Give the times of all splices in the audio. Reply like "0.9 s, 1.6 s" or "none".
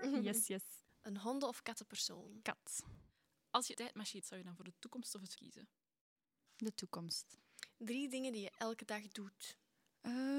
3.7 s, 4.2 s, 5.4 s